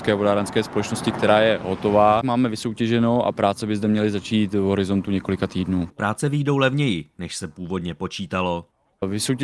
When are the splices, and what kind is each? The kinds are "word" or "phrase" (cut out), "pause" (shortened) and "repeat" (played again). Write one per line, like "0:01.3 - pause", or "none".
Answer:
none